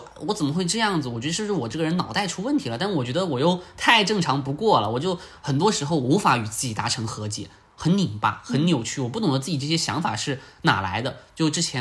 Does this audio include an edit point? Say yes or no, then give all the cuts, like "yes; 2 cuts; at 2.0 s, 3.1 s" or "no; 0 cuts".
no; 0 cuts